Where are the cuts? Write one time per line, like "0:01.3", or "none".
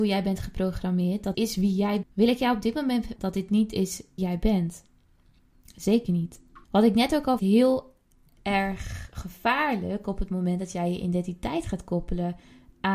0:01.3
0:02.0
0:03.2
0:04.2
0:06.6
0:07.4